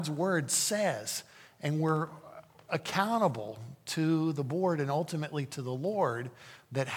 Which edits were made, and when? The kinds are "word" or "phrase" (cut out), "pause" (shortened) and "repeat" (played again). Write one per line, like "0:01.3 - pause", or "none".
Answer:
none